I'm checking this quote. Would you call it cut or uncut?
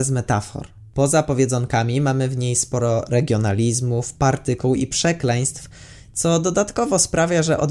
uncut